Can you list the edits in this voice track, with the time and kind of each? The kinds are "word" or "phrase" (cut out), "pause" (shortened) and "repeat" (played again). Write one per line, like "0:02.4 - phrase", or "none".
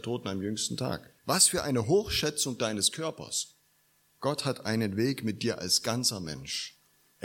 0:01.2 - pause
0:03.7 - pause